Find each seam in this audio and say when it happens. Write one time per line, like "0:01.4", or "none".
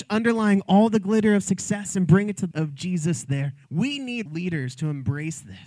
0:02.5
0:03.6
0:04.3

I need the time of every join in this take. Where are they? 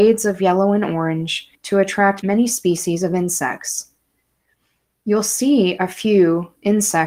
none

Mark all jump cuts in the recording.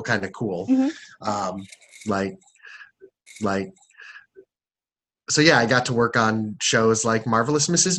0:03.3

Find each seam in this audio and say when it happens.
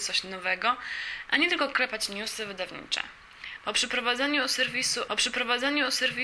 0:05.1

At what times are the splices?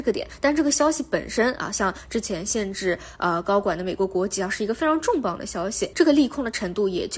0:05.9

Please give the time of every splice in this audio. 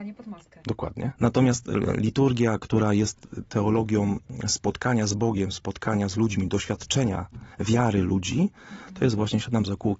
0:01.1
0:07.5

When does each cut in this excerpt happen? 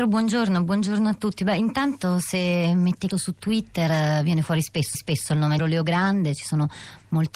0:03.1
0:04.9
0:05.6

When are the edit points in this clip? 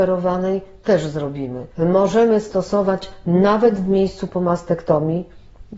0:01.7

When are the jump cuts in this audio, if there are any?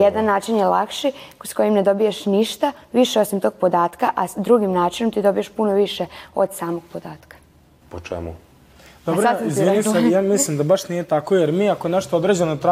none

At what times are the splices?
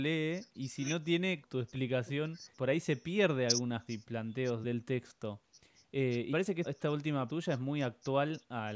0:01.4
0:02.5
0:03.9
0:04.6
0:06.3
0:06.6
0:07.3

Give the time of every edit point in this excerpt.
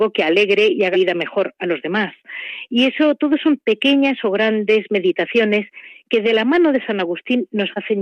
0:00.9

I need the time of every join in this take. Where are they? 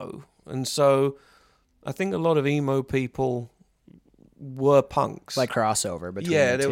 0:05.5

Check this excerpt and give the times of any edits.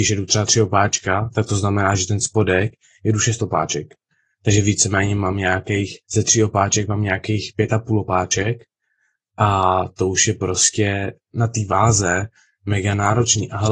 0:06.0

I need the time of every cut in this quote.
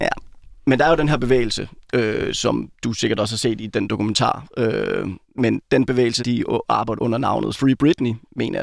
0:02.7
0:05.2
0:06.2
0:07.0
0:07.5

